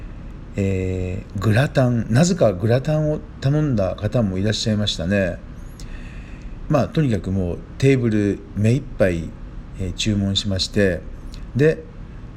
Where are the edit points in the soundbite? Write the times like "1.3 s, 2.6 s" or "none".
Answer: 6.7 s